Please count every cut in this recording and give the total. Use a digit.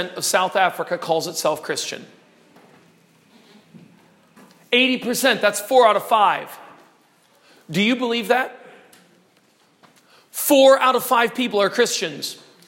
0